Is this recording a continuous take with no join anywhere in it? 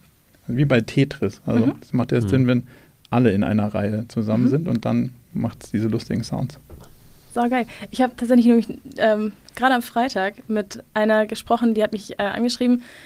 yes; 0 cuts

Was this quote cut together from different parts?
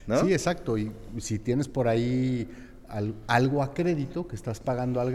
no; 0 cuts

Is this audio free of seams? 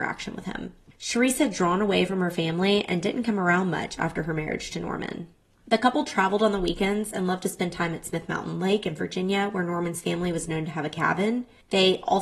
yes; 0 cuts

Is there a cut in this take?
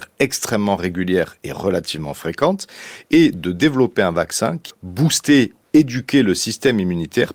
yes; 1 cut; at 4.7 s

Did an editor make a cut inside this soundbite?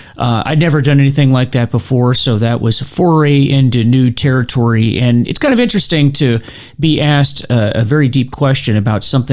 no; 0 cuts

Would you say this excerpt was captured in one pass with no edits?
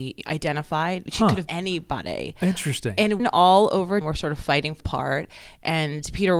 no; 4 cuts; at 1.5 s, 3.2 s, 4.0 s, 4.8 s

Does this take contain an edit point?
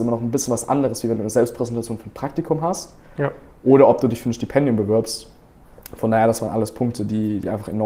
no; 0 cuts

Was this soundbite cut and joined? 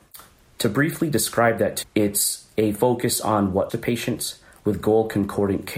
yes; 2 cuts; at 1.8 s, 3.7 s

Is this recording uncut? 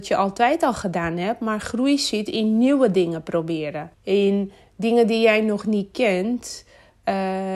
no; 1 cut; at 3.9 s

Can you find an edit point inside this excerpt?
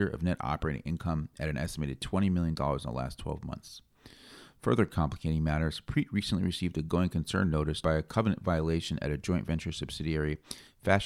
yes; 1 cut; at 7.8 s

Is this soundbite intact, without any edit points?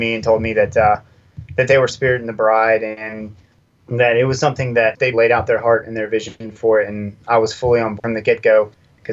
no; 3 cuts; at 1.9 s, 5.1 s, 8.0 s

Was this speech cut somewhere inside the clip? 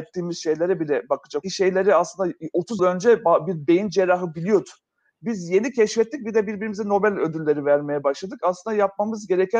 yes; 2 cuts; at 1.4 s, 2.8 s

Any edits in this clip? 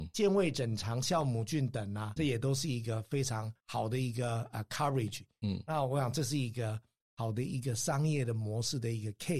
yes; 1 cut; at 2.2 s

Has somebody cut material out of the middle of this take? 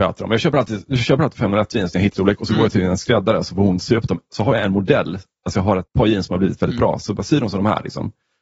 yes; 2 cuts; at 1.3 s, 2.1 s

